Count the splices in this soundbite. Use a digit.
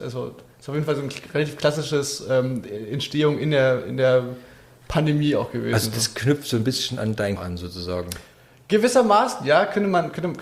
1